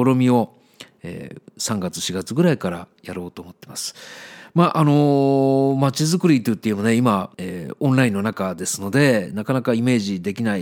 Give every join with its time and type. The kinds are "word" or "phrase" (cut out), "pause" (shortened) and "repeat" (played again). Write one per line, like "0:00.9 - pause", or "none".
0:07.3 - pause